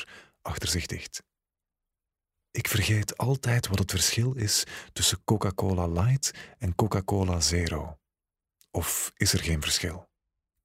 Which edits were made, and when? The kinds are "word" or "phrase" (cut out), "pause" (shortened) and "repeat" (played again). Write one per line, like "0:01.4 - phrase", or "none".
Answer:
none